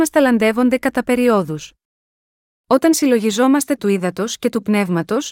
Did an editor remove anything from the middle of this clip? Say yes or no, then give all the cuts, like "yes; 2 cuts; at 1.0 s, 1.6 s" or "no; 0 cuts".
yes; 1 cut; at 3.8 s